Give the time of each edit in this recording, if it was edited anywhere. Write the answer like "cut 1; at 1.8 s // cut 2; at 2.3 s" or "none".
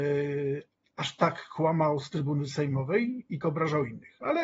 cut 1; at 3.4 s